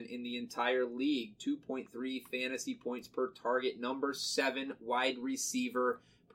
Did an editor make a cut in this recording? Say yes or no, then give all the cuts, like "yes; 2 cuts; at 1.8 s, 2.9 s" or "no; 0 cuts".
no; 0 cuts